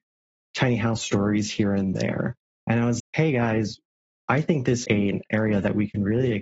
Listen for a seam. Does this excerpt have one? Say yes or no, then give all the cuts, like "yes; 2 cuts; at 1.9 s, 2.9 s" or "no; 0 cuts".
yes; 2 cuts; at 3.0 s, 4.8 s